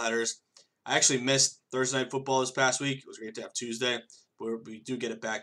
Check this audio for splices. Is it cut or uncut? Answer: uncut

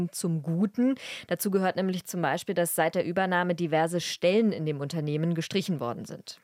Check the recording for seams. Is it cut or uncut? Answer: uncut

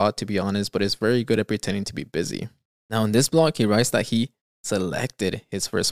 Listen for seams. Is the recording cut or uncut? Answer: uncut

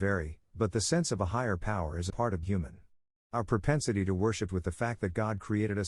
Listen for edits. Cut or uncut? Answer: cut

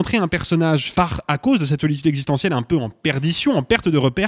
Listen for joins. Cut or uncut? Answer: cut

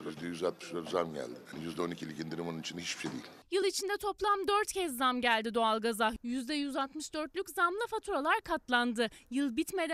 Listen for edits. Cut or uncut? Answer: uncut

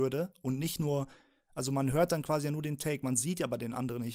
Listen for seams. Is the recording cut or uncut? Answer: uncut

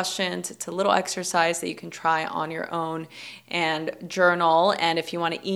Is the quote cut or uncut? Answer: uncut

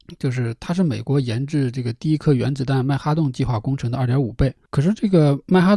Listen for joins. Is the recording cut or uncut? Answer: cut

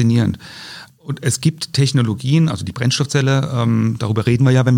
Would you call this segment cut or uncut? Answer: uncut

